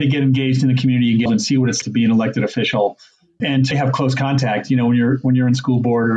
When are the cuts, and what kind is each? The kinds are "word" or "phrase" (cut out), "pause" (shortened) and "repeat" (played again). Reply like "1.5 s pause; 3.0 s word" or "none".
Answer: 1.3 s word; 1.8 s word; 3.4 s word; 3.7 s word